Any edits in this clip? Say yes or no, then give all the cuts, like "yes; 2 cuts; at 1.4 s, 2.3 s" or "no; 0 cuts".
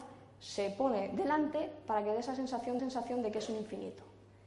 yes; 1 cut; at 2.8 s